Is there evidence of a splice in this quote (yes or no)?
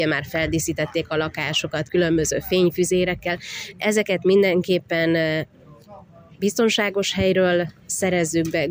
yes